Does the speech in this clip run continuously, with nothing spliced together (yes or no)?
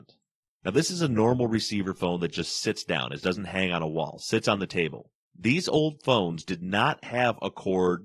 yes